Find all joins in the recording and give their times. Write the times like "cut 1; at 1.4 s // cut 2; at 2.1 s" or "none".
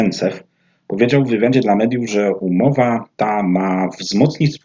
none